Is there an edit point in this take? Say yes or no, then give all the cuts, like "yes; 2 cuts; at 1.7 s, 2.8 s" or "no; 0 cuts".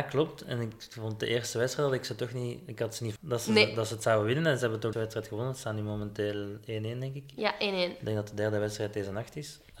yes; 2 cuts; at 3.2 s, 4.9 s